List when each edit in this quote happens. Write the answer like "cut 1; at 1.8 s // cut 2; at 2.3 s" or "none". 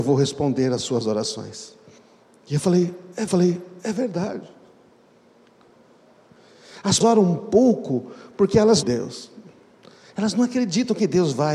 cut 1; at 2.0 s // cut 2; at 3.3 s // cut 3; at 7.0 s // cut 4; at 8.8 s